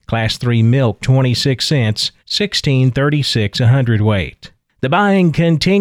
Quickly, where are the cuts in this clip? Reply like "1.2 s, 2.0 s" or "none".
1.0 s, 2.2 s